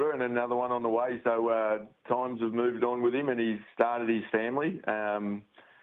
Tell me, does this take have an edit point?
no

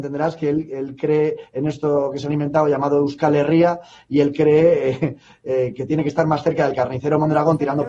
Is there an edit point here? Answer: no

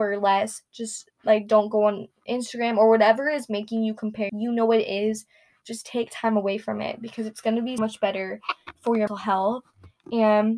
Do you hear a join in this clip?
yes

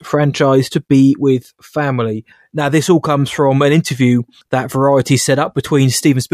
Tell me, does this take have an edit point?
yes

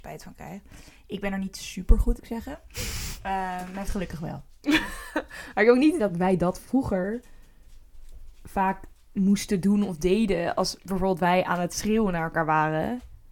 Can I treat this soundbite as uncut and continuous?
no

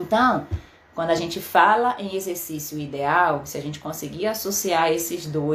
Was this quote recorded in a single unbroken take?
yes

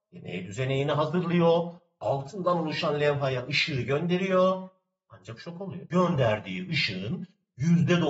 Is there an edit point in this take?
no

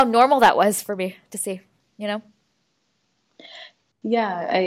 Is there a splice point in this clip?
no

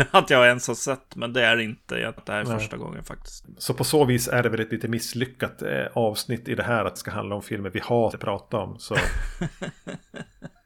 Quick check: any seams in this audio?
yes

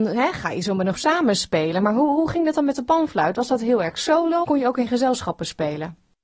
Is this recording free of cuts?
no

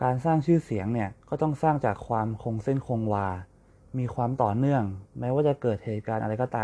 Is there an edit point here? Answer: yes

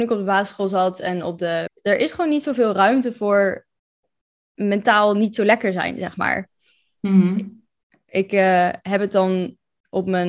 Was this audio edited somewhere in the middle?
yes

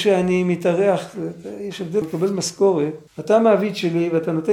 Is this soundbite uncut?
no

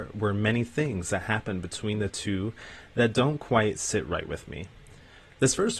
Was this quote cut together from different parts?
no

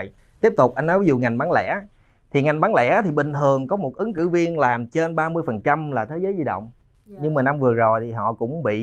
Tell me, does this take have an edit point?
no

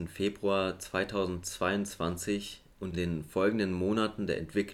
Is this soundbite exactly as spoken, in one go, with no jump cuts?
no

